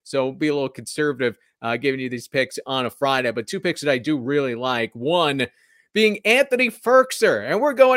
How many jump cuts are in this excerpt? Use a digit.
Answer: 0